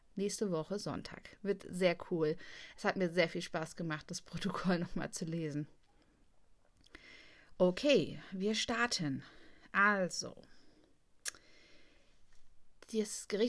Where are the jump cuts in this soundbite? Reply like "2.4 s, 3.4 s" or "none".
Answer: none